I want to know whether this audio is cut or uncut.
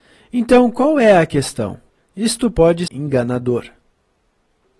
cut